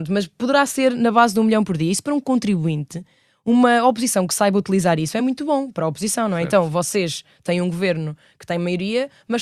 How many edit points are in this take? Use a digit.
0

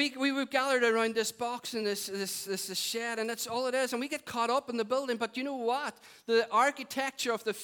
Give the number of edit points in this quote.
0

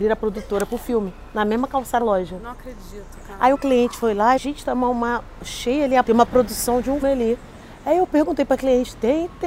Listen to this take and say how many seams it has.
5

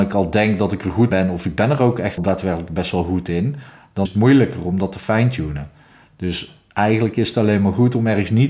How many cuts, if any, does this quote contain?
3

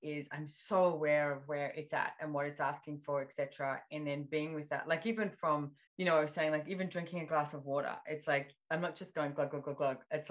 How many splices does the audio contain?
1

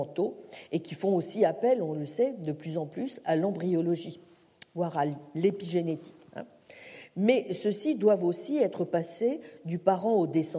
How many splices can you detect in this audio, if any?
0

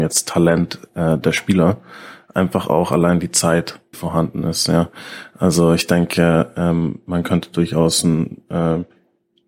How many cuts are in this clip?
1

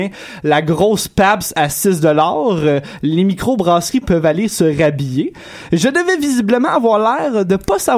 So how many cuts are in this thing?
0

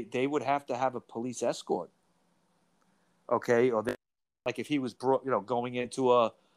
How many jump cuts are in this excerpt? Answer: 0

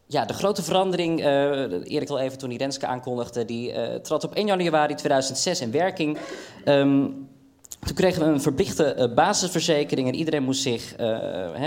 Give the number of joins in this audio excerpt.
1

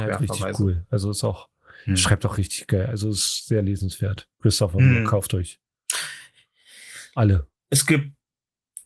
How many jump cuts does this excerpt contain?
1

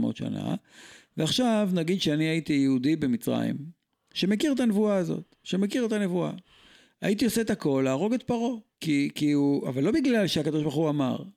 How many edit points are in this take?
1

